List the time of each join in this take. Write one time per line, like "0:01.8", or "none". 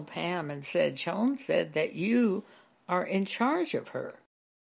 none